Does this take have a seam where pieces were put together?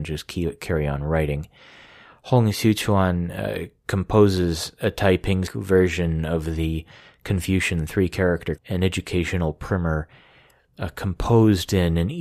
yes; 2 cuts; at 5.5 s, 8.6 s

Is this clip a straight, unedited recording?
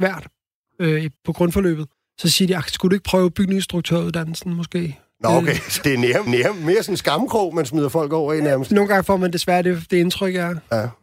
no; 4 cuts; at 1.2 s, 1.9 s, 5.8 s, 6.3 s

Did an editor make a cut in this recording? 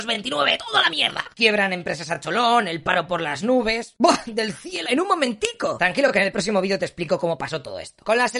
yes; 1 cut; at 4.9 s

